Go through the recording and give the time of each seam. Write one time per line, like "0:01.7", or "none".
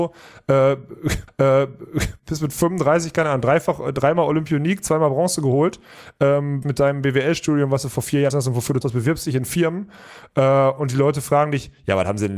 0:01.3
0:06.6
0:08.3
0:08.8